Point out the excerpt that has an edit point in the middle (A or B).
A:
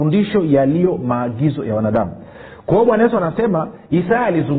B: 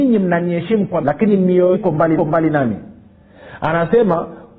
B